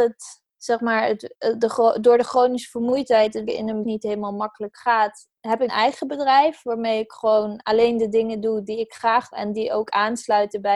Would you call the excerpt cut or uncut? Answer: cut